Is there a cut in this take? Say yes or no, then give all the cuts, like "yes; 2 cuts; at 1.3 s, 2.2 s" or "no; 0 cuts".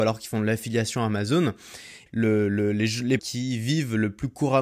yes; 2 cuts; at 2.1 s, 3.2 s